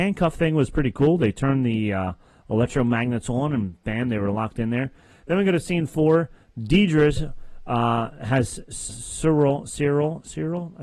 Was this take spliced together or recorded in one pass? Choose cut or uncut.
cut